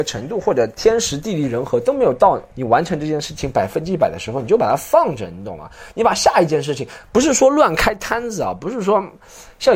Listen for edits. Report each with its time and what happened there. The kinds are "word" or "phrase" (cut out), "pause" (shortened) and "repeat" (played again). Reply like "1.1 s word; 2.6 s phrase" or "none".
2.5 s pause